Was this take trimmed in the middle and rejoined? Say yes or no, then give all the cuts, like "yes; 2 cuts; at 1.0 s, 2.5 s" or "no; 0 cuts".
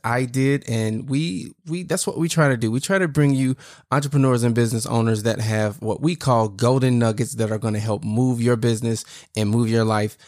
no; 0 cuts